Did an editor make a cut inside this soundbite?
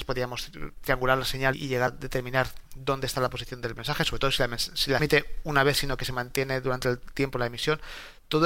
yes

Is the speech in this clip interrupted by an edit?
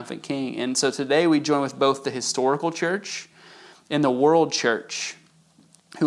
no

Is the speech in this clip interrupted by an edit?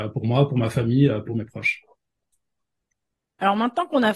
no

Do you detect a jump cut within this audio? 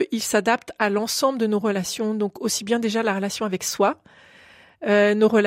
no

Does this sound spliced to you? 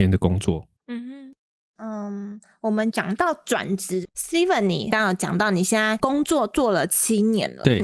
no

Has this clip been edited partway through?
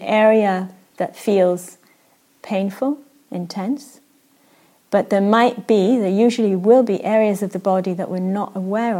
no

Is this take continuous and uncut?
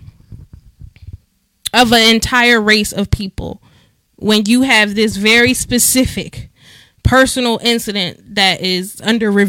yes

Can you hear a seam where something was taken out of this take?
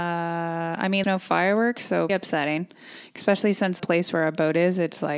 yes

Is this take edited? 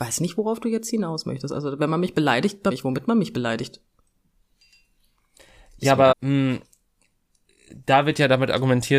yes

